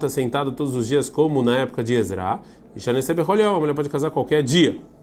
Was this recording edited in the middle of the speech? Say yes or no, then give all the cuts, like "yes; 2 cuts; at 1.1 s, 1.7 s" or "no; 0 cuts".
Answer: no; 0 cuts